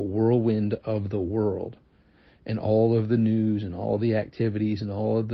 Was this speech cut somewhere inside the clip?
no; 0 cuts

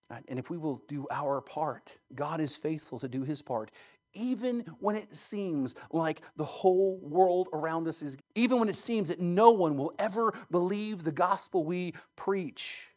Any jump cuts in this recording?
yes; 2 cuts; at 2.0 s, 8.2 s

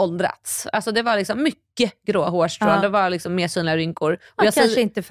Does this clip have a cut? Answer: no; 0 cuts

